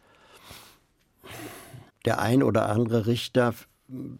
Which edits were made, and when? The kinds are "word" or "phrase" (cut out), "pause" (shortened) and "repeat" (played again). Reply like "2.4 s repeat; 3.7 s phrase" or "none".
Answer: 1.9 s pause